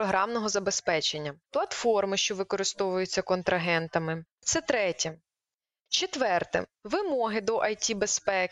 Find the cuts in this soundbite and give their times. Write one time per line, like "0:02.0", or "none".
0:01.4
0:06.8